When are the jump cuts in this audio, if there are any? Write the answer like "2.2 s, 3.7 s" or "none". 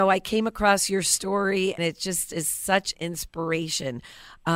1.8 s, 2.9 s